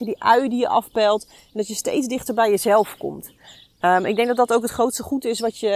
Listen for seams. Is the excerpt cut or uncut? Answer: uncut